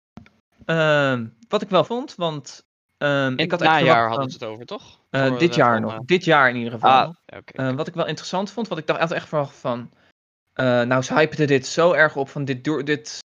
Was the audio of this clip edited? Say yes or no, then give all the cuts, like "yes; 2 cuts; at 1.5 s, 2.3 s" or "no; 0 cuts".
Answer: yes; 3 cuts; at 1.9 s, 5.1 s, 7.2 s